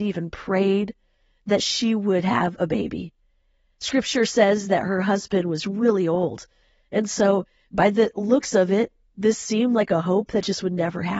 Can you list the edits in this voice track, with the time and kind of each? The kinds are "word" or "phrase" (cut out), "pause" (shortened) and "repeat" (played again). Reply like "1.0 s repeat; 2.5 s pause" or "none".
none